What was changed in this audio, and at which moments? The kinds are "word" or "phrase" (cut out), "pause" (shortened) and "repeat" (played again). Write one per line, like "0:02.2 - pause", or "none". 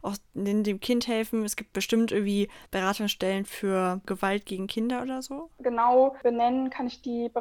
0:02.7 - pause